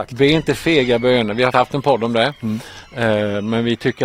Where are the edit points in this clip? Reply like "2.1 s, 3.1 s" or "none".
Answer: 1.5 s